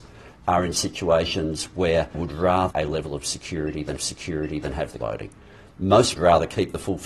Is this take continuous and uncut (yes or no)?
no